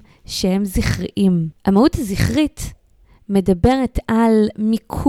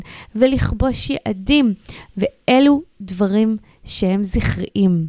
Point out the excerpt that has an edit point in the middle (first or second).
first